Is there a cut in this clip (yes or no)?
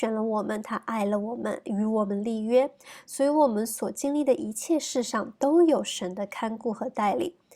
no